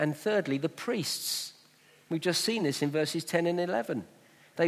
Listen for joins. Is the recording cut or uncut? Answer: uncut